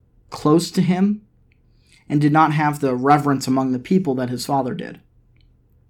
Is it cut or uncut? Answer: cut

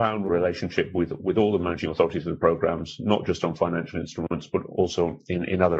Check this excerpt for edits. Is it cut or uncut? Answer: uncut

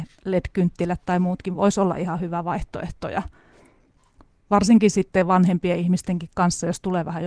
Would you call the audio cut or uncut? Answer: uncut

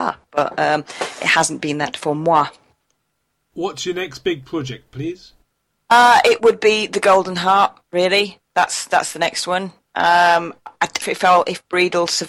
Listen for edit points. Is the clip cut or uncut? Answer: cut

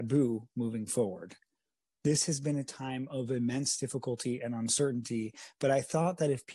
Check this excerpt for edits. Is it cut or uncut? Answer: uncut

